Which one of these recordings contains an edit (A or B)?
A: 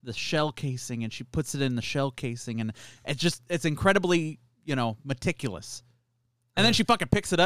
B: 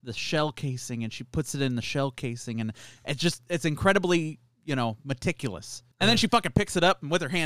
B